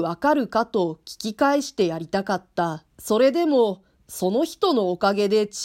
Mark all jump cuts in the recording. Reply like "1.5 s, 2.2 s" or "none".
2.9 s